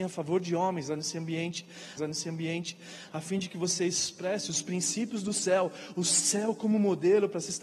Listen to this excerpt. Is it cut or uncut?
cut